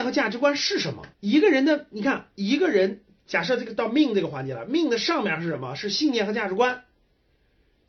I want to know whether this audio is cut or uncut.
cut